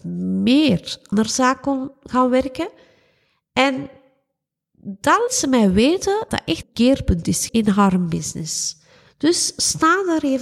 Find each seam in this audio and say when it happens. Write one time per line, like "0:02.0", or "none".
0:01.1
0:05.3
0:06.3
0:06.6
0:07.5